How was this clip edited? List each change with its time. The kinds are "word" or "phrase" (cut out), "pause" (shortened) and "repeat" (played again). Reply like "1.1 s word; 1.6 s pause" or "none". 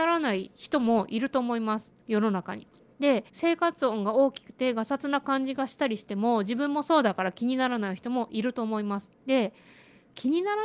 2.0 s pause; 3.3 s pause